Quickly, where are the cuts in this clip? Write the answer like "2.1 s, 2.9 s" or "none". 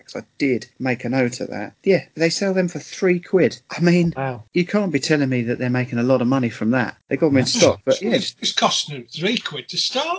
none